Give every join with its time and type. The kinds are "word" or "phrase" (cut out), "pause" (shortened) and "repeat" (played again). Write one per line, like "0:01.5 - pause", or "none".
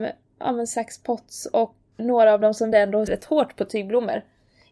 0:02.0 - word
0:02.7 - word
0:03.1 - word